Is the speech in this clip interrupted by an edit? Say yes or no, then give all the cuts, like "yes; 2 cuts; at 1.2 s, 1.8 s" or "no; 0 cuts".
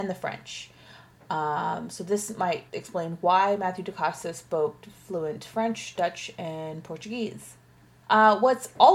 yes; 1 cut; at 2.7 s